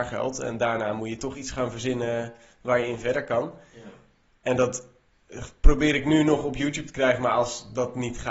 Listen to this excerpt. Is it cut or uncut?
uncut